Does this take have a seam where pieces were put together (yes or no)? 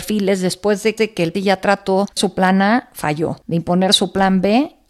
yes